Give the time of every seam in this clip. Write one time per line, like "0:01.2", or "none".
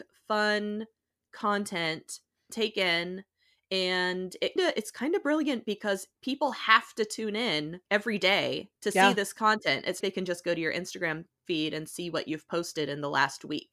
0:02.5
0:04.6
0:06.2
0:07.9
0:08.7
0:10.0